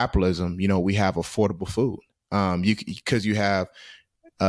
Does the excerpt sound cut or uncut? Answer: cut